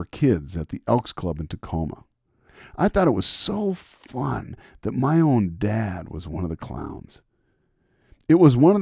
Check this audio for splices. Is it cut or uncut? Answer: uncut